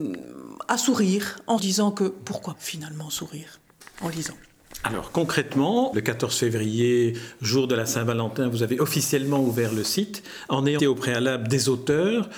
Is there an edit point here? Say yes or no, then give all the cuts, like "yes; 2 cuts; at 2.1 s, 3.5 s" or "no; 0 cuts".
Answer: yes; 4 cuts; at 1.6 s, 2.5 s, 5.9 s, 10.8 s